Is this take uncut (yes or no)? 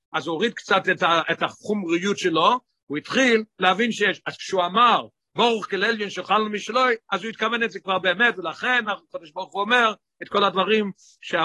yes